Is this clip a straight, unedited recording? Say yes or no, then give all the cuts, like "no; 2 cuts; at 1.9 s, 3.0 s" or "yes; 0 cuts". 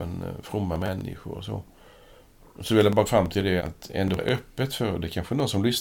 no; 3 cuts; at 3.1 s, 3.6 s, 4.2 s